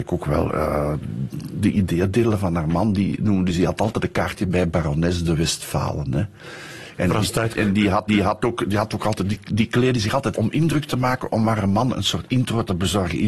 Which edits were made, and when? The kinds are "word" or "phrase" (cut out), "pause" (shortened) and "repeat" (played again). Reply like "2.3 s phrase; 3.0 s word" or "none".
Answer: 7.6 s word; 8.1 s repeat; 10.3 s phrase